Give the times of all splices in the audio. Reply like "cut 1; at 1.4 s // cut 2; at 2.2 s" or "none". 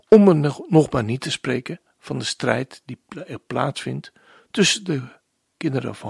none